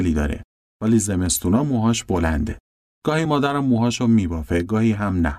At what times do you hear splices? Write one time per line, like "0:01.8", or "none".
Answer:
none